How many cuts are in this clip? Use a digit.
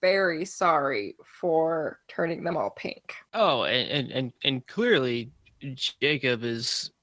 2